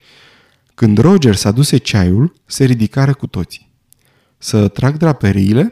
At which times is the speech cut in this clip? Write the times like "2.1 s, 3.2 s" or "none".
none